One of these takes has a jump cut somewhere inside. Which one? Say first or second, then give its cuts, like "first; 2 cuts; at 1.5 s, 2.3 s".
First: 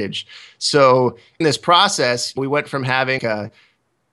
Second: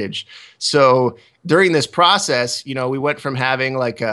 first; 3 cuts; at 1.4 s, 2.4 s, 3.2 s